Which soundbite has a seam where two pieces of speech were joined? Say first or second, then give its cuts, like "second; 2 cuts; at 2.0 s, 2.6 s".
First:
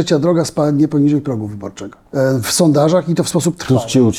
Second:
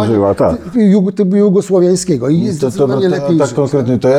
first; 1 cut; at 2.1 s